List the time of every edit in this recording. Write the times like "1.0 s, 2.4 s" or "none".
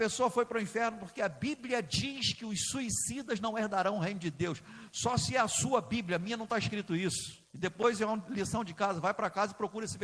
7.4 s